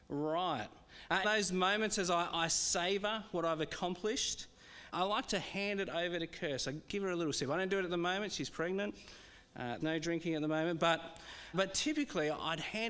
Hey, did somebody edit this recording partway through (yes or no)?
yes